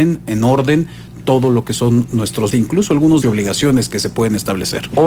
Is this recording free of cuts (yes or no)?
no